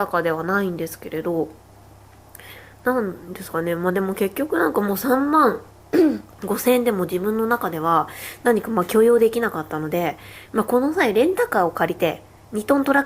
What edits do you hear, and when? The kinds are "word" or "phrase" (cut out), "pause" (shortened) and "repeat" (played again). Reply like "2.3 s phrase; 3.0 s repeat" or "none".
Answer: 6.3 s pause